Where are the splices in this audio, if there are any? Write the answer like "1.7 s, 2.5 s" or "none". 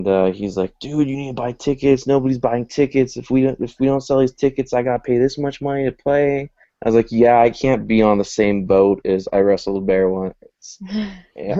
6.6 s